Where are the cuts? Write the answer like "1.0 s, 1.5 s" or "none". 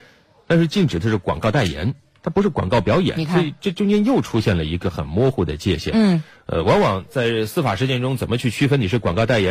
none